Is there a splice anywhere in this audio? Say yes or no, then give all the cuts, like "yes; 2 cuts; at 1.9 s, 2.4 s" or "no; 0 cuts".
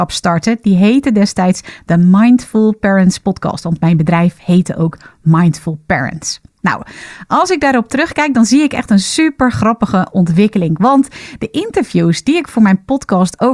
no; 0 cuts